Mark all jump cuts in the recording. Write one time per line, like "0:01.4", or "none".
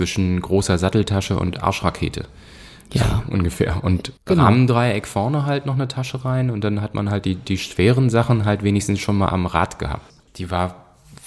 0:04.2